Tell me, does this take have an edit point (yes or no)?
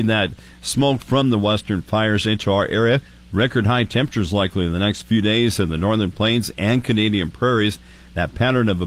no